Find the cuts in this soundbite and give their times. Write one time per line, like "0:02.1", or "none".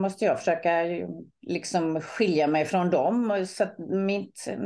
0:01.3